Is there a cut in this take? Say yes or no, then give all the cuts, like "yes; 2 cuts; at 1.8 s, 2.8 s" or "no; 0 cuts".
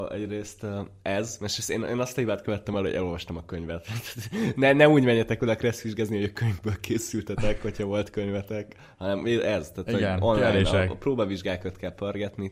no; 0 cuts